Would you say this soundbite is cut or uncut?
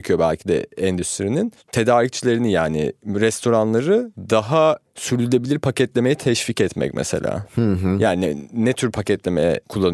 uncut